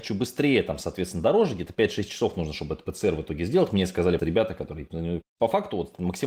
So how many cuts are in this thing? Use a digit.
1